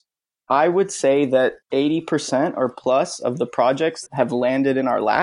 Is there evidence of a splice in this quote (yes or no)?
yes